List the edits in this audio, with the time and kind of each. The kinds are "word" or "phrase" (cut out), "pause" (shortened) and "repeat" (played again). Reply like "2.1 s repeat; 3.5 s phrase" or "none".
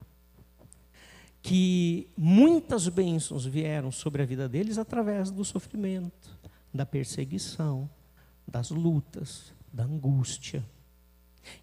none